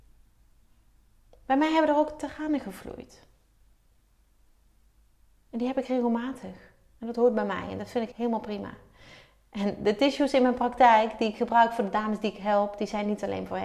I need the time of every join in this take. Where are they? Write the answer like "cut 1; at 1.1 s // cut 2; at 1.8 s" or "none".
cut 1; at 8.1 s